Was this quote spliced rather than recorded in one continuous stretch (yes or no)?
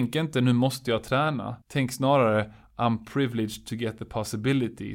yes